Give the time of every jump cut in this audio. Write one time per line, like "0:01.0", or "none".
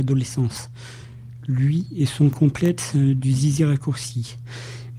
none

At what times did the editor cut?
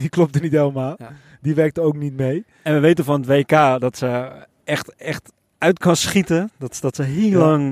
none

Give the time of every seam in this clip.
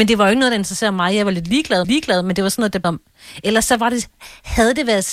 0:01.8
0:02.8

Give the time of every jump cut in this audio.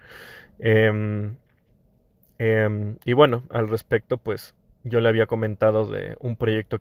none

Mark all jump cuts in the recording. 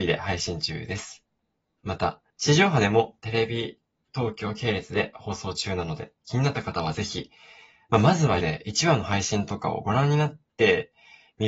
0:02.3
0:03.2
0:08.4

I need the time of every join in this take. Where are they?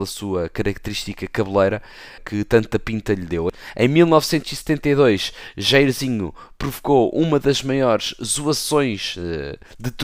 0:02.2

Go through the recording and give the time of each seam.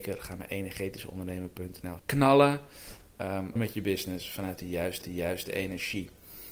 0:02.0
0:03.6
0:05.0

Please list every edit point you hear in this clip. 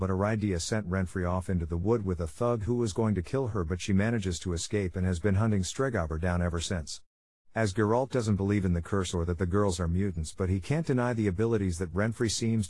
none

